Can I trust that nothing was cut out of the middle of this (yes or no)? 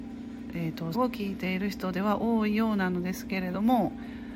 no